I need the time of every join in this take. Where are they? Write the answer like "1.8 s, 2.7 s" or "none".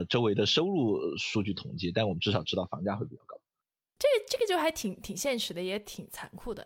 none